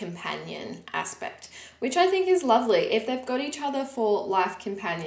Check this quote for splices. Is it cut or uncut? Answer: uncut